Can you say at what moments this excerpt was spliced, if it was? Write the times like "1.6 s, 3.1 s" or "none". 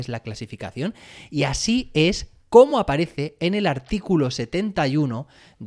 none